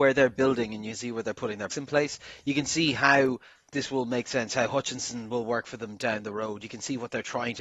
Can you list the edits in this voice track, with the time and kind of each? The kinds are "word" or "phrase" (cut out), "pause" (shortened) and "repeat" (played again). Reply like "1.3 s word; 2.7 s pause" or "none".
1.7 s word